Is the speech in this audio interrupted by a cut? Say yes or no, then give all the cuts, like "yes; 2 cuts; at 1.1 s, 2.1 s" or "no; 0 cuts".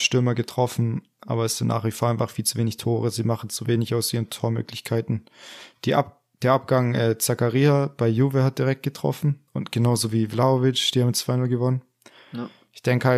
yes; 1 cut; at 9.5 s